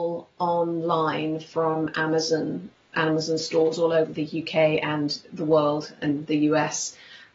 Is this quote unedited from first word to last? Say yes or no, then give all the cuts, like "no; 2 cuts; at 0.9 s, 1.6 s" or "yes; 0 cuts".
yes; 0 cuts